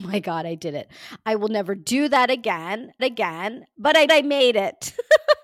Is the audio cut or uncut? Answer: cut